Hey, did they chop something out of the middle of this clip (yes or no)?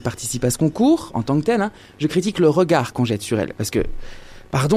no